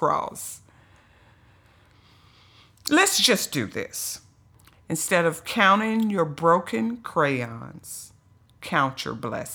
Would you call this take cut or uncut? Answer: uncut